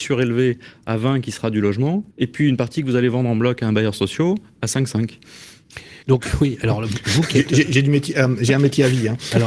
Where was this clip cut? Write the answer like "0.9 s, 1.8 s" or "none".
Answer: 2.1 s, 6.0 s